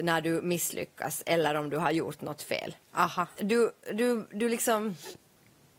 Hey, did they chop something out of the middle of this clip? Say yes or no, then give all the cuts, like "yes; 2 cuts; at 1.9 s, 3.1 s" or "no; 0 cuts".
yes; 1 cut; at 2.8 s